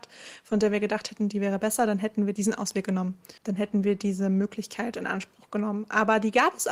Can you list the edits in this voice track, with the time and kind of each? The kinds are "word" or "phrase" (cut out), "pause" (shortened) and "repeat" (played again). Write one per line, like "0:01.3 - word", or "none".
0:03.4 - pause

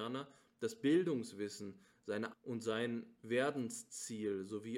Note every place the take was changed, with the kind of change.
0:02.3 - word

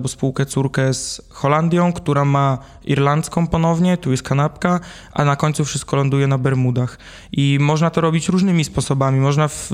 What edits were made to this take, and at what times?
none

